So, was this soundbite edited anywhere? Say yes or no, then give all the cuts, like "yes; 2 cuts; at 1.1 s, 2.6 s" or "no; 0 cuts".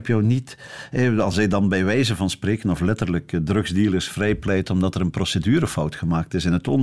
no; 0 cuts